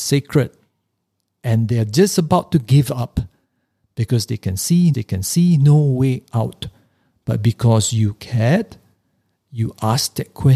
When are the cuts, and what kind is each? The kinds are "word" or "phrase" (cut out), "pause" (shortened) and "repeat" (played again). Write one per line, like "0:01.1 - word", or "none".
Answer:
0:04.9 - repeat